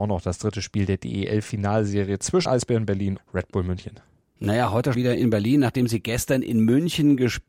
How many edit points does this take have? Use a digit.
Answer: 3